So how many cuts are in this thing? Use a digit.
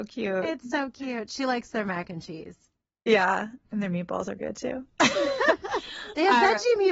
1